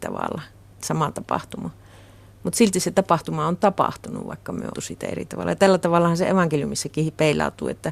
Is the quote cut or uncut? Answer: cut